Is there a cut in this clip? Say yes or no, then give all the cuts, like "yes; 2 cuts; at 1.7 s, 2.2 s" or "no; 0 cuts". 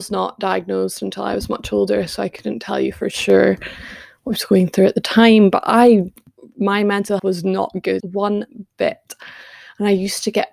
yes; 2 cuts; at 7.2 s, 8.0 s